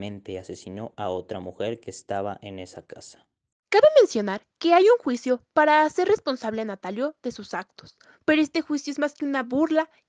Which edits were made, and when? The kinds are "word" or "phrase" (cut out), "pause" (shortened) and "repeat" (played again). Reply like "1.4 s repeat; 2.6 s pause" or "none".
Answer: 4.5 s pause

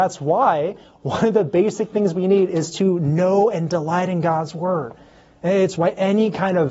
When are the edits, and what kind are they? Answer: none

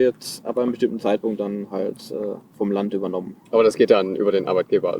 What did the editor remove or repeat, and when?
3.4 s pause

